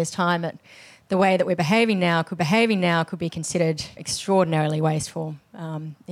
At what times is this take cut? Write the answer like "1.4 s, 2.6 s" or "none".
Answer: 2.4 s, 4.0 s